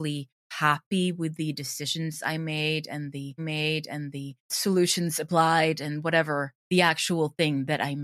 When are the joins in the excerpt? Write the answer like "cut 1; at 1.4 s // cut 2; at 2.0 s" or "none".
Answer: cut 1; at 3.4 s